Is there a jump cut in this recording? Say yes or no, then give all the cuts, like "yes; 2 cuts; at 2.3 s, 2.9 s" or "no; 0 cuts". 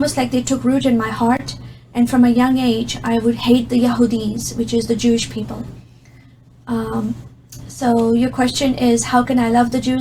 no; 0 cuts